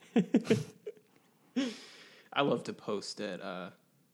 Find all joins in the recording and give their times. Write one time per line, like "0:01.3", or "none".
none